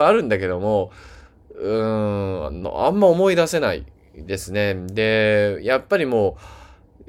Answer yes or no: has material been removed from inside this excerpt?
no